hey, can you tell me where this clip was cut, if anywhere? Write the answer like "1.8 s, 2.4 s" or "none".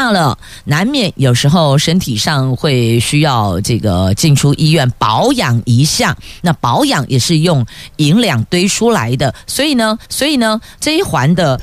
10.1 s